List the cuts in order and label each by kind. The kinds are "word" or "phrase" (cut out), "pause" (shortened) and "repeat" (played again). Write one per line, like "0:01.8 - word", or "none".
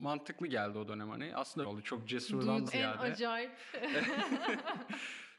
0:01.6 - phrase
0:02.7 - word

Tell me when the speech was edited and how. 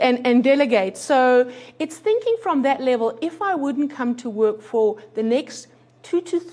none

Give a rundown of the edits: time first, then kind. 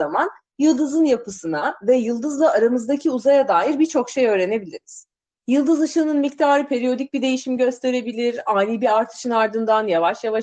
none

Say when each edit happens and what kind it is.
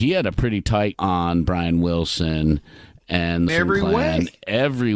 0:00.9 - word
0:03.5 - phrase

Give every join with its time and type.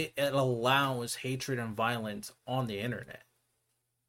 0:02.4 - pause

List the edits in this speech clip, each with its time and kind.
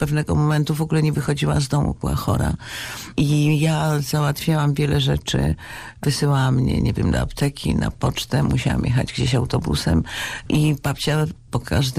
none

